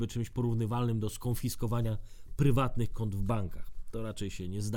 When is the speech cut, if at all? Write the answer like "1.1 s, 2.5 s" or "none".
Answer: none

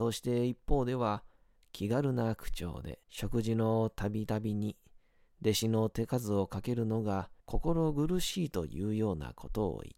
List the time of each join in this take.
3.0 s, 7.4 s

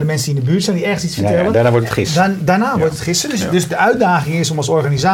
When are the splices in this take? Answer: 3.7 s

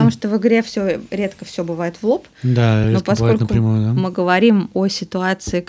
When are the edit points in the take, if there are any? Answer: none

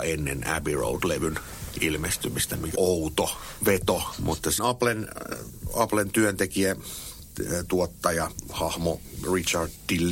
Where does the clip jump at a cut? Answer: 2.8 s, 4.6 s

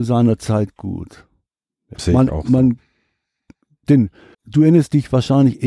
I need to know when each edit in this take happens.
2.0 s, 4.3 s

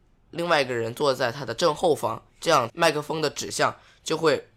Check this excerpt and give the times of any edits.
2.3 s

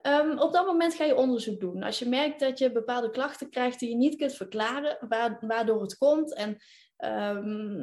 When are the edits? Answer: none

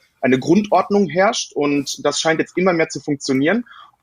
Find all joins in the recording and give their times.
none

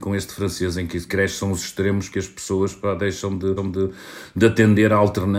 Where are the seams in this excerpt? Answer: 1.1 s, 2.1 s, 3.6 s

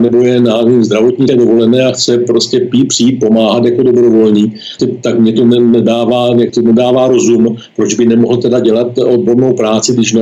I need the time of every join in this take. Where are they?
1.3 s, 4.8 s, 6.5 s

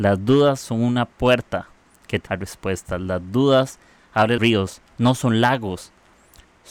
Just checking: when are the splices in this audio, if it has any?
2.3 s, 4.4 s

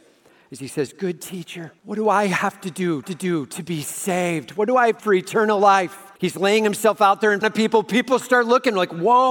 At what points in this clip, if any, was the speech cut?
1.8 s, 3.0 s, 5.0 s, 6.2 s, 7.4 s

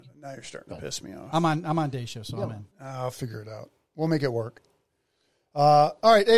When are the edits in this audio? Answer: 2.7 s

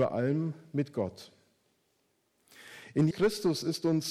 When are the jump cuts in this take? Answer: 3.1 s

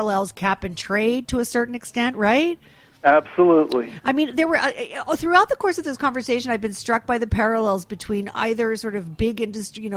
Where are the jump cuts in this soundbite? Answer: none

